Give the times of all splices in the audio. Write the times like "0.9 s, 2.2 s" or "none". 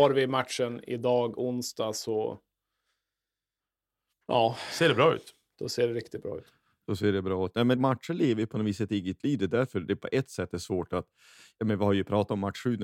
7.8 s